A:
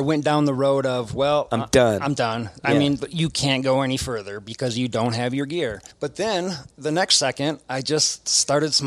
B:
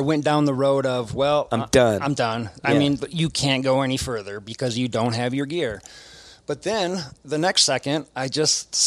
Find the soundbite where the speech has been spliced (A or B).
A